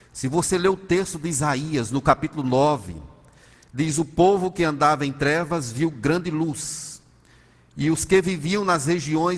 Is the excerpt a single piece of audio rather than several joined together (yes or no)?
yes